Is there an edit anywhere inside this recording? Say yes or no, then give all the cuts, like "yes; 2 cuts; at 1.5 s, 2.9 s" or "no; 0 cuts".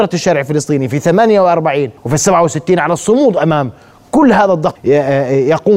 yes; 2 cuts; at 2.0 s, 4.8 s